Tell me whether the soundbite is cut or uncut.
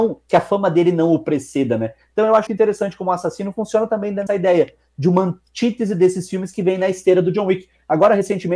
cut